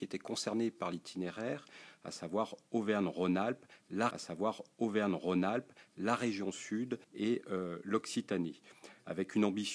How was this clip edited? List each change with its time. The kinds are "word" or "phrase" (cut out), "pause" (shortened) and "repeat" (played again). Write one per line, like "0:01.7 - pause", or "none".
0:04.1 - repeat
0:07.0 - pause